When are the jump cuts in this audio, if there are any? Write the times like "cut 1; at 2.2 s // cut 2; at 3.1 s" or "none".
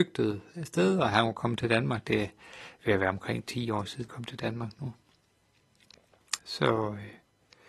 cut 1; at 4.1 s // cut 2; at 6.4 s